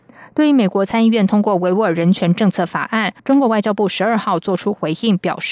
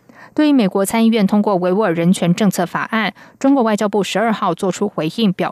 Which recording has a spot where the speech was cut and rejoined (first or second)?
first